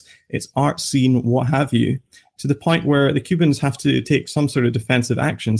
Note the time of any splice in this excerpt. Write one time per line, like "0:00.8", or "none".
none